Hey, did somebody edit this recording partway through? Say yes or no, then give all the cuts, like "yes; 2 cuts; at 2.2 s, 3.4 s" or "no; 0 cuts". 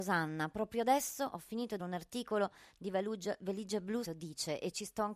yes; 2 cuts; at 1.8 s, 4.0 s